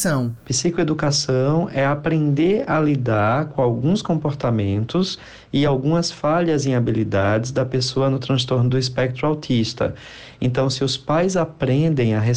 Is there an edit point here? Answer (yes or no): no